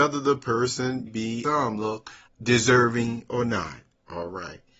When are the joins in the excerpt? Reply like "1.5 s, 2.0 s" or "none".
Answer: 1.1 s, 1.4 s, 2.3 s